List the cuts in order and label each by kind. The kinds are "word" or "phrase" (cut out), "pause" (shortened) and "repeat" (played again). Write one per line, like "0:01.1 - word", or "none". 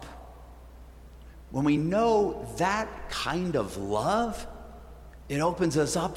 none